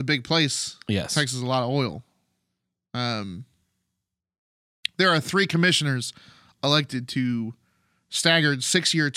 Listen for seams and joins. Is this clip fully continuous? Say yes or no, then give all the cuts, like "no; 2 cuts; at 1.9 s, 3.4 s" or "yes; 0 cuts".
yes; 0 cuts